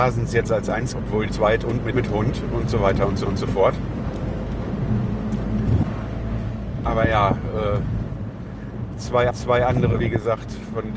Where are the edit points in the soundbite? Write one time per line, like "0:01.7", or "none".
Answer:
0:00.9
0:01.3
0:01.9
0:03.3
0:09.3